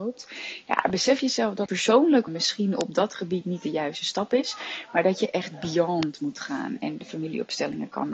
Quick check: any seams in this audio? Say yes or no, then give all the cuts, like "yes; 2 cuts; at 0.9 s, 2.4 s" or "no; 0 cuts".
yes; 2 cuts; at 1.7 s, 2.3 s